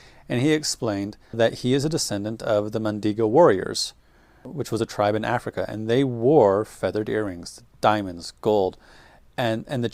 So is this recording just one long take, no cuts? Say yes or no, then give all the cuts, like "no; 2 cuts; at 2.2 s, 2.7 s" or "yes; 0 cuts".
yes; 0 cuts